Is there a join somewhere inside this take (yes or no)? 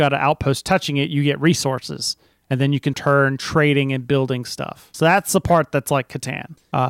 yes